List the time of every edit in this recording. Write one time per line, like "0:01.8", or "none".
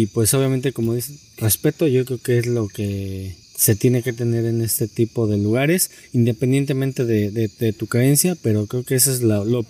0:03.4